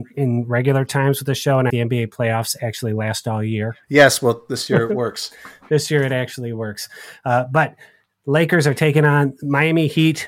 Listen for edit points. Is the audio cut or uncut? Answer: cut